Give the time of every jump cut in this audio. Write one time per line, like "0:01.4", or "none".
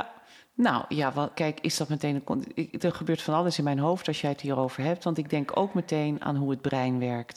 0:01.3